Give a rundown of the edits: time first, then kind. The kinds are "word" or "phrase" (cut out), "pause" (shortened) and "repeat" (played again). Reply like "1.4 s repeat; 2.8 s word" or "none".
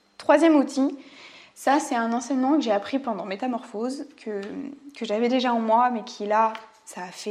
none